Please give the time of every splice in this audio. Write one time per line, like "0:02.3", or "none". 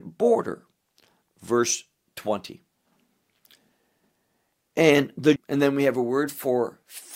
0:05.4